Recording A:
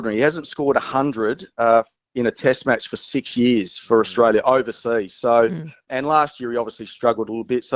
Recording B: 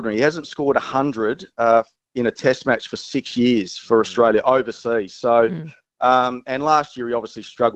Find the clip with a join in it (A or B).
A